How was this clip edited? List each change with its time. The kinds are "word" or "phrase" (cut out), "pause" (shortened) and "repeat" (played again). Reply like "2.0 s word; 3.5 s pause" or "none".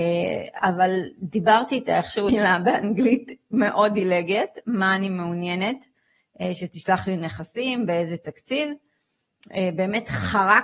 2.3 s word